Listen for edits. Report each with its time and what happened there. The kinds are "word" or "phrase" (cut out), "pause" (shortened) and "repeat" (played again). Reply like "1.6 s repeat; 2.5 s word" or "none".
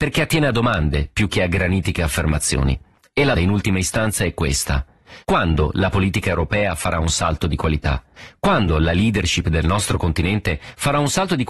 3.3 s word; 5.2 s pause